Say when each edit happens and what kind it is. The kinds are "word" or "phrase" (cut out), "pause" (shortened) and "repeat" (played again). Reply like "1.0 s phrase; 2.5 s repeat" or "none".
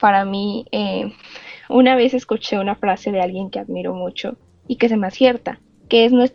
5.1 s word